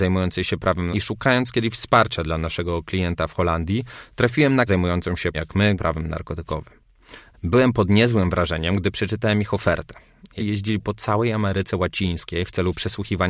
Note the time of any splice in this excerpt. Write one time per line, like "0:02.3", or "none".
0:00.9
0:04.7
0:05.3
0:05.7
0:10.4